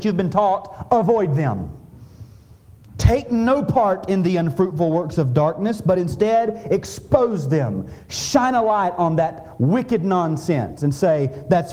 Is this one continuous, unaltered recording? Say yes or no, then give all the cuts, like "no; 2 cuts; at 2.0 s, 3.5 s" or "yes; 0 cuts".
yes; 0 cuts